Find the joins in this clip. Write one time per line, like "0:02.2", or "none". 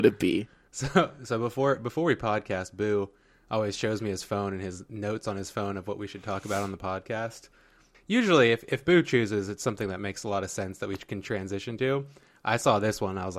none

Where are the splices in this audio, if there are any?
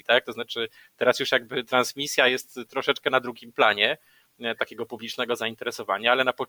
none

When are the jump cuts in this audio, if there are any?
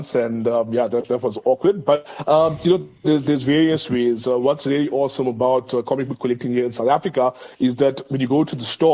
0:03.0

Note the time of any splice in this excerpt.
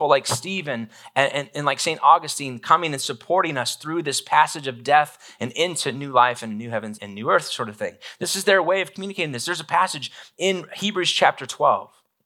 0:07.0

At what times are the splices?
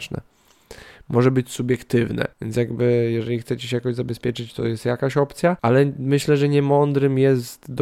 0:02.3
0:05.6

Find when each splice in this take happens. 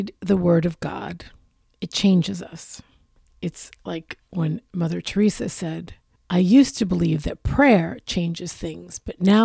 none

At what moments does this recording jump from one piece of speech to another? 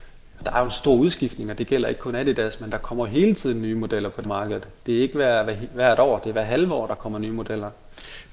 0:04.2

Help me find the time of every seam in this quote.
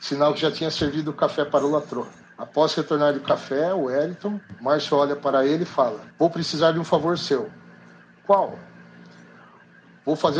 0:02.2
0:06.1

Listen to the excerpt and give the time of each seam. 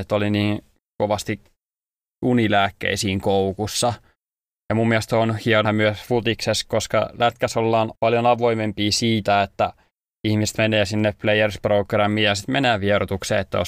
0:05.6
0:07.9

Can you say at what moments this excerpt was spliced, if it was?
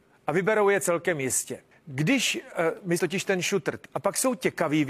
0:01.7
0:03.0
0:03.8

